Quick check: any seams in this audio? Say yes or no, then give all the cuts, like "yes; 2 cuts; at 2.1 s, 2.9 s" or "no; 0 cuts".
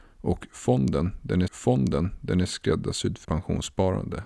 yes; 2 cuts; at 1.5 s, 3.2 s